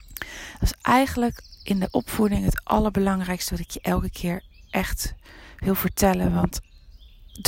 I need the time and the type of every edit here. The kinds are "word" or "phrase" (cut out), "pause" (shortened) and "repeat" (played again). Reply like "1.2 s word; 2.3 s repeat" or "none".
none